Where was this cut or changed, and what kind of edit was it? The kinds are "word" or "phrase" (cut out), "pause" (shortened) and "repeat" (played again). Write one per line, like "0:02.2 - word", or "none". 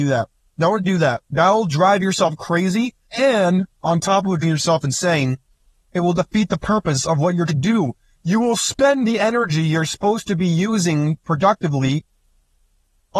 0:01.3 - pause
0:03.0 - pause
0:04.4 - word
0:07.5 - word